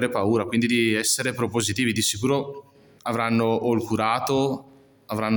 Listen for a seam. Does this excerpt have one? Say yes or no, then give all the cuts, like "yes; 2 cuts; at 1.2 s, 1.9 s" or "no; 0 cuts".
no; 0 cuts